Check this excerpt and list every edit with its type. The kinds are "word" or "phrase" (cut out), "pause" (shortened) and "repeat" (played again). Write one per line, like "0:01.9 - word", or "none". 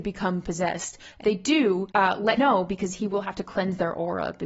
0:01.2 - word
0:01.9 - pause
0:02.4 - word